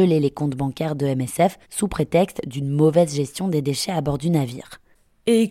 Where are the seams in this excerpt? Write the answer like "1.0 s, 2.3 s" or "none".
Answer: 1.6 s